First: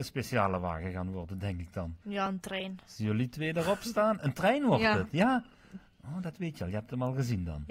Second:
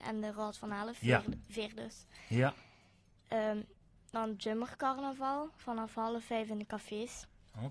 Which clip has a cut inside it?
first; 1 cut; at 2.0 s

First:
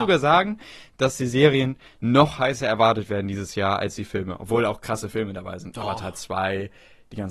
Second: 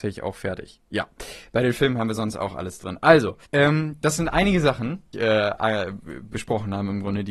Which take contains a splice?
second; 2 cuts; at 3.5 s, 5.1 s

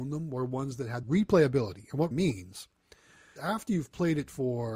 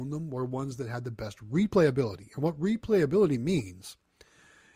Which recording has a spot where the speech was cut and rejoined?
first; 3 cuts; at 1.0 s, 2.1 s, 3.4 s

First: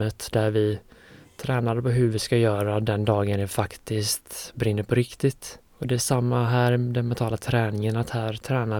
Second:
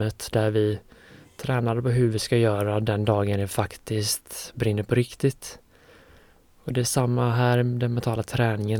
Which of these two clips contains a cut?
first; 1 cut; at 5.7 s

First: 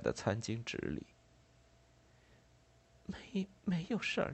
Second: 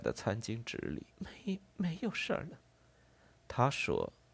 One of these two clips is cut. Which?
second; 1 cut; at 1.1 s

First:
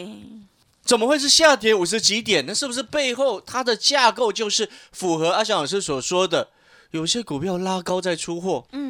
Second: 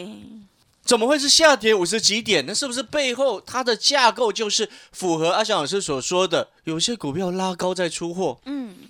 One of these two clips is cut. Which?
second; 1 cut; at 6.6 s

